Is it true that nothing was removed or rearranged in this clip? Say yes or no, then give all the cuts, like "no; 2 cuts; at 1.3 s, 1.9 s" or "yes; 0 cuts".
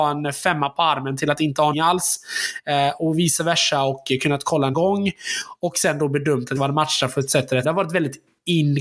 no; 4 cuts; at 1.7 s, 4.7 s, 6.6 s, 7.6 s